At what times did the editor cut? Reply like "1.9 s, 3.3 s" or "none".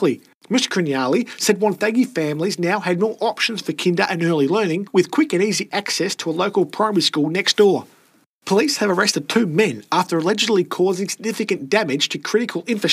none